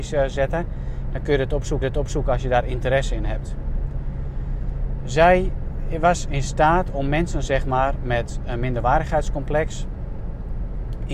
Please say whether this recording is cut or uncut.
cut